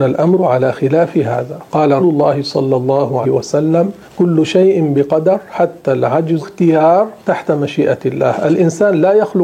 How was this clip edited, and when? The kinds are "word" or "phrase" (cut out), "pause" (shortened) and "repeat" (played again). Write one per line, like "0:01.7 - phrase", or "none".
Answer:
0:02.0 - word
0:03.2 - word
0:04.0 - pause
0:06.4 - phrase
0:07.2 - pause